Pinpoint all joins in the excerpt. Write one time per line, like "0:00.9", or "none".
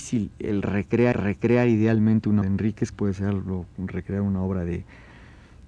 0:01.1
0:02.4
0:02.9

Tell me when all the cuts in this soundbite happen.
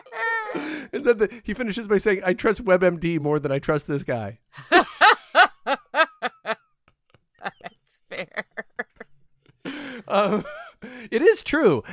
none

